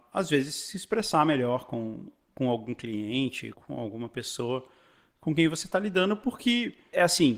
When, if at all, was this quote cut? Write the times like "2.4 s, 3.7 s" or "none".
3.5 s